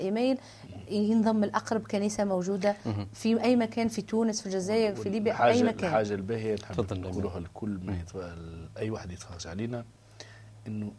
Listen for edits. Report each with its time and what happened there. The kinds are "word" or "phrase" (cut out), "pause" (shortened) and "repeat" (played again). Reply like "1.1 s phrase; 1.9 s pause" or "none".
none